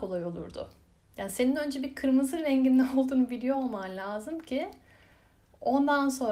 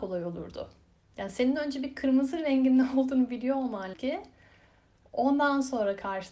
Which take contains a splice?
second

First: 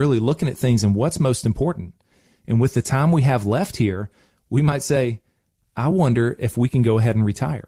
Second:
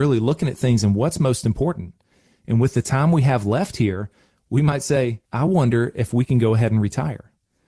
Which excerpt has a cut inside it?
second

